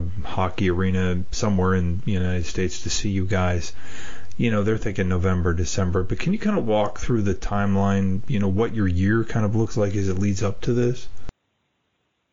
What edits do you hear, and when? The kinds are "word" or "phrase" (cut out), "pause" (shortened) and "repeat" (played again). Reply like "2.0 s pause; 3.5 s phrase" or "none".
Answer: none

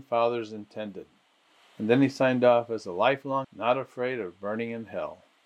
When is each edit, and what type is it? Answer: 1.5 s pause; 3.4 s word

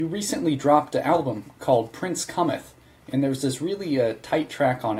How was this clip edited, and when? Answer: none

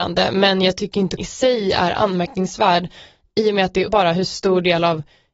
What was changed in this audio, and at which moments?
1.2 s word; 3.9 s word

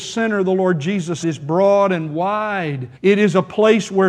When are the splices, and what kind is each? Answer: 1.2 s word; 3.0 s pause

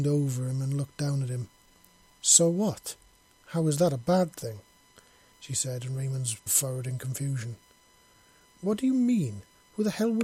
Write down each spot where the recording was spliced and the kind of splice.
6.5 s word

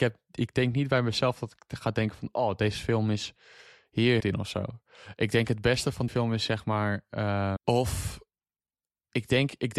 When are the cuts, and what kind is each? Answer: 4.2 s phrase; 6.1 s word; 7.6 s word

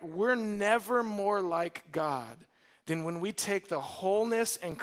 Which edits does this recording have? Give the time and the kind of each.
none

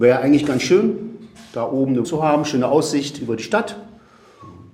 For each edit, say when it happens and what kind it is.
2.0 s word

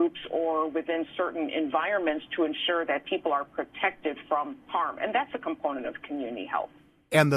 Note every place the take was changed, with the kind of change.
none

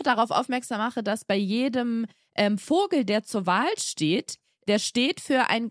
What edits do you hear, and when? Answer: none

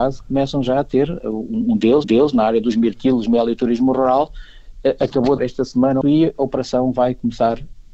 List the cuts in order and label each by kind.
2.0 s repeat; 5.4 s word; 6.0 s phrase

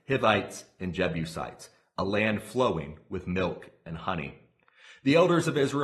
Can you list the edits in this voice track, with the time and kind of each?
none

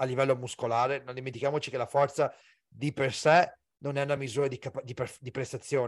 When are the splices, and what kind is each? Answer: none

